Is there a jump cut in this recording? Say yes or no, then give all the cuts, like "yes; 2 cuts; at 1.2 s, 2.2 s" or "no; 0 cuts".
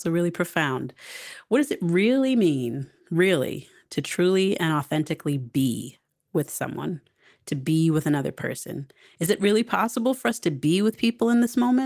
no; 0 cuts